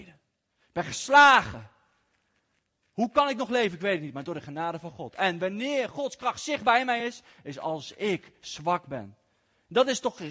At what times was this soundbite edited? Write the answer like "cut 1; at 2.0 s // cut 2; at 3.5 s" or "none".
none